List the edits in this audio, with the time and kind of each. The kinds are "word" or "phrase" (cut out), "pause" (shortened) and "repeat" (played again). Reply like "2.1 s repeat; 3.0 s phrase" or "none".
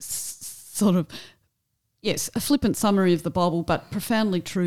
none